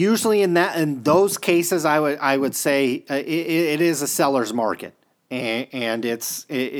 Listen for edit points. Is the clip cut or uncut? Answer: uncut